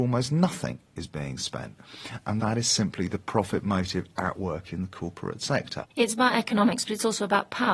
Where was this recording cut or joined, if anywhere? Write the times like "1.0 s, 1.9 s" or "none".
5.9 s